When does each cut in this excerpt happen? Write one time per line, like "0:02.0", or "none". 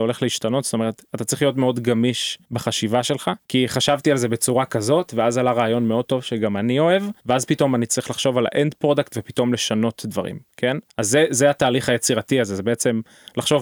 0:02.4
0:03.4
0:07.2
0:10.9